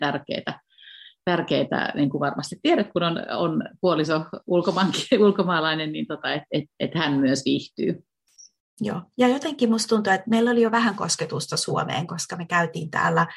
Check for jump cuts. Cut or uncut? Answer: uncut